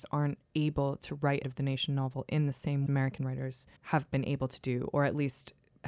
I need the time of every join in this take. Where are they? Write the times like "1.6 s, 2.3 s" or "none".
1.4 s, 2.9 s, 3.8 s